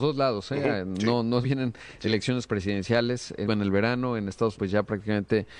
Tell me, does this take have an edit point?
yes; 4 cuts; at 1.4 s, 2.5 s, 3.5 s, 4.6 s

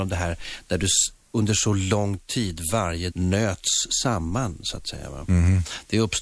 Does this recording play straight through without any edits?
no; 1 cut; at 3.1 s

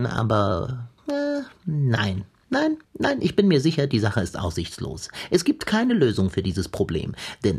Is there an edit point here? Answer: yes; 2 cuts; at 1.0 s, 2.8 s

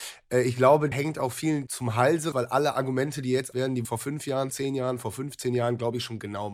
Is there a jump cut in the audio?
yes; 6 cuts; at 0.9 s, 1.7 s, 2.3 s, 3.5 s, 3.8 s, 4.5 s

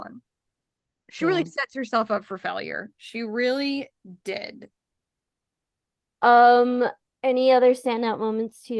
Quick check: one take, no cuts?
yes; 0 cuts

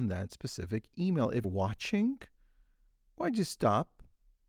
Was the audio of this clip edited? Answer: yes; 1 cut; at 1.4 s

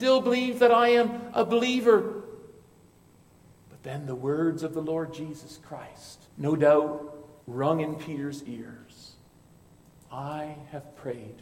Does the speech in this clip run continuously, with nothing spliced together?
no; 2 cuts; at 6.3 s, 7.4 s

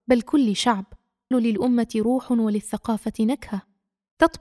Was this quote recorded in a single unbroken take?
no; 1 cut; at 1.3 s

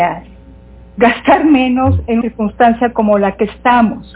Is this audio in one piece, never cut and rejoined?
no; 1 cut; at 2.2 s

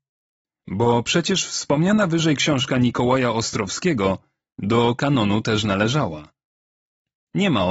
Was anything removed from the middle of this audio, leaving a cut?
no; 0 cuts

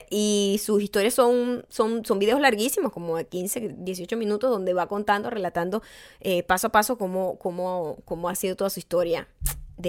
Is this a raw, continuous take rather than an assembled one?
yes; 0 cuts

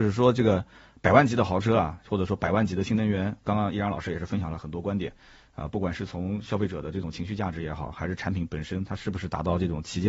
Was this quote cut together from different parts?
no; 0 cuts

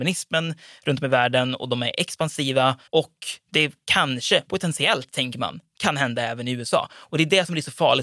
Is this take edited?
yes; 1 cut; at 2.9 s

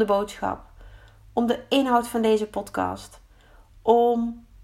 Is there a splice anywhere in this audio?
no; 0 cuts

